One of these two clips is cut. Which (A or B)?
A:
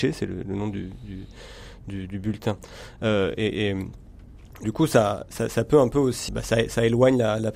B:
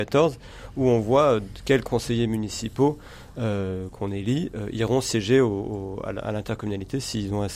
A